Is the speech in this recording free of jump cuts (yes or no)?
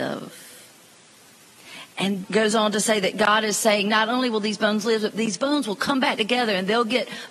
no